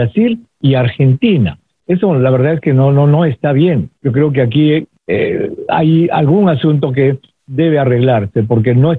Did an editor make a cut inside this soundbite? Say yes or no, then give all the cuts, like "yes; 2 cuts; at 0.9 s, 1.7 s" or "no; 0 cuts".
yes; 2 cuts; at 4.0 s, 5.0 s